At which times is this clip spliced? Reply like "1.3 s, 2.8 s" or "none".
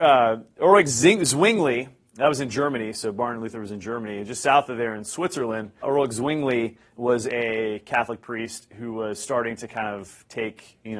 5.8 s, 6.9 s